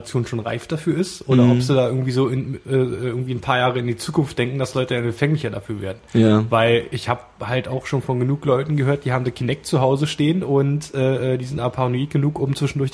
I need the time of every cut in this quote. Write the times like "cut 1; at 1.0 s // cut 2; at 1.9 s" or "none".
none